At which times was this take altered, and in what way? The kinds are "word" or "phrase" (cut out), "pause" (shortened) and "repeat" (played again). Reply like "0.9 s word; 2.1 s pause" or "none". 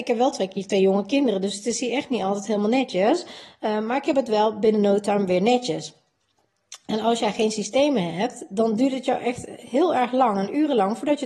none